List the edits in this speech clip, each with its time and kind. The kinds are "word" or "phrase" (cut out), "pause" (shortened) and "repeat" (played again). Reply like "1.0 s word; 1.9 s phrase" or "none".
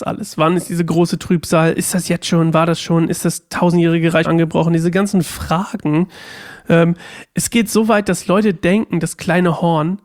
4.2 s word